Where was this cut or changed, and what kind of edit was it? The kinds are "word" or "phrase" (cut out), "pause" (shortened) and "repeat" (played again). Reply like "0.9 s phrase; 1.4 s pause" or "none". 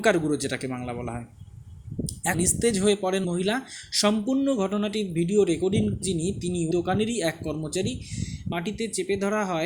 2.3 s word; 3.2 s word; 6.0 s word; 6.7 s word; 8.5 s phrase